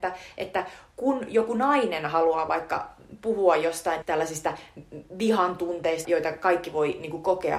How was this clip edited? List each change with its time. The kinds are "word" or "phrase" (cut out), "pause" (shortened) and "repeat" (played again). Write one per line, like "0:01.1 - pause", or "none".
0:04.0 - word
0:06.0 - word